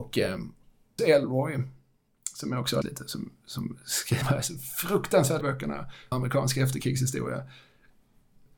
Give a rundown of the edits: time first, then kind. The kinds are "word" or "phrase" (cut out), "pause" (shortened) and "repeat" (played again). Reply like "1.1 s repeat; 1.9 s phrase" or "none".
1.0 s word; 2.8 s word; 4.2 s word; 5.4 s word; 6.1 s word